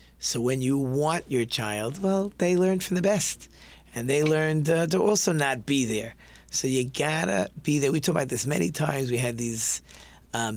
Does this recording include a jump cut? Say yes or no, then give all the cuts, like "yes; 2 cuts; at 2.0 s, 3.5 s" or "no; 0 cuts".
no; 0 cuts